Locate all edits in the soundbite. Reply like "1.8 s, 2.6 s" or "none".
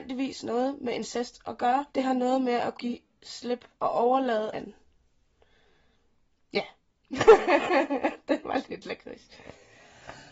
1.9 s, 2.7 s, 3.7 s, 4.5 s